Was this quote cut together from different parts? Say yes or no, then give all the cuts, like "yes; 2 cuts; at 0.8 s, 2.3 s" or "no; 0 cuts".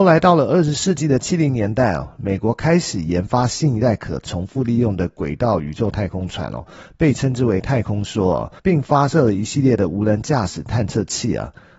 yes; 1 cut; at 8.6 s